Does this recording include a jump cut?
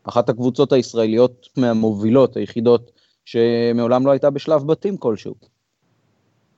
yes; 1 cut; at 1.5 s

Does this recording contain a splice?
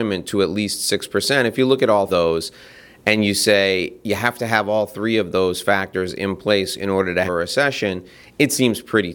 yes; 2 cuts; at 2.1 s, 7.3 s

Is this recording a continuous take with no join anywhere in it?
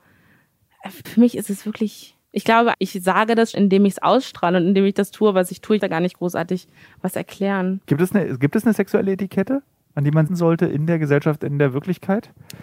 no; 7 cuts; at 1.0 s, 2.2 s, 2.7 s, 3.5 s, 5.8 s, 7.8 s, 10.3 s

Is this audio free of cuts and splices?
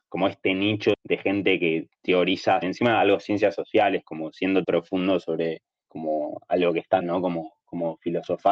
no; 4 cuts; at 0.9 s, 2.6 s, 4.6 s, 7.0 s

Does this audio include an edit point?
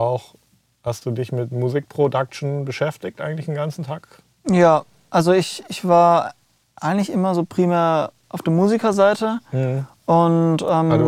no; 0 cuts

